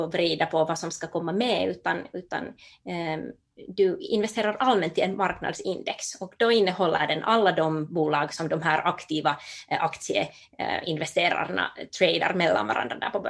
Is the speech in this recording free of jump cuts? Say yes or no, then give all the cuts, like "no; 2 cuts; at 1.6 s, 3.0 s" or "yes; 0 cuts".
yes; 0 cuts